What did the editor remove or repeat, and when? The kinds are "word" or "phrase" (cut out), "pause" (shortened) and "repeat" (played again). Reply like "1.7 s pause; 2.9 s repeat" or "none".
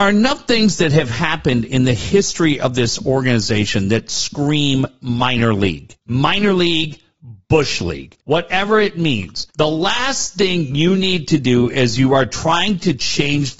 6.0 s pause; 8.2 s pause; 9.5 s pause